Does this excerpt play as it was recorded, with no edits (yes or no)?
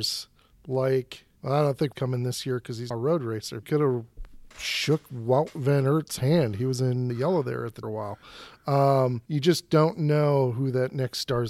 no